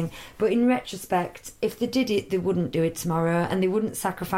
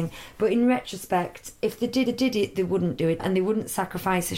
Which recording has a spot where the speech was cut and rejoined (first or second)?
second